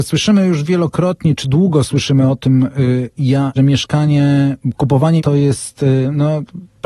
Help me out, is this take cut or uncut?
cut